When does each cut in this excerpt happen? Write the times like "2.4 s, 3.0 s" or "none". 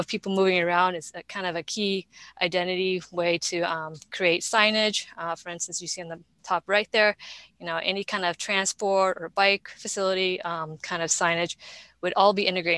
none